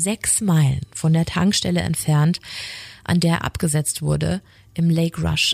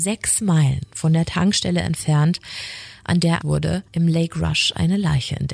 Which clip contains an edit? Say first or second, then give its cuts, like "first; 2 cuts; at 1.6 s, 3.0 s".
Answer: second; 2 cuts; at 3.4 s, 3.9 s